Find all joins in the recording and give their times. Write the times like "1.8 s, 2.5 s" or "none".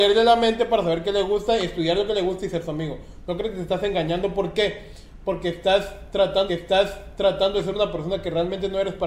6.5 s